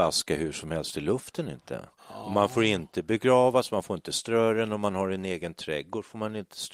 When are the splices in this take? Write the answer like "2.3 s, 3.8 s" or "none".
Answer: 2.0 s